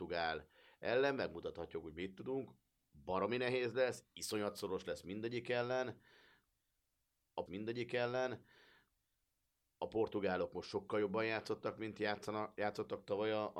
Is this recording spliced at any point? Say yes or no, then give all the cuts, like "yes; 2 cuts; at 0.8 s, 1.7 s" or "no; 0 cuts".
yes; 1 cut; at 7.5 s